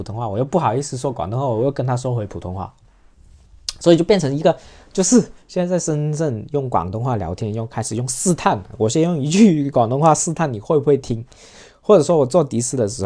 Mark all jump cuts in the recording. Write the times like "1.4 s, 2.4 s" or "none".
none